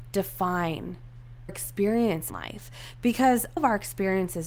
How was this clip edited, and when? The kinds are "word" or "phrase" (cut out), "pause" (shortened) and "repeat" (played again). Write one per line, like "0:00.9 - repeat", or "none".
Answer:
0:01.5 - word
0:02.3 - word
0:03.6 - word